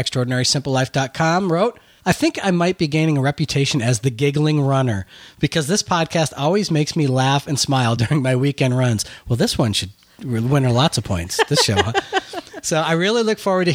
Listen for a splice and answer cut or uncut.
uncut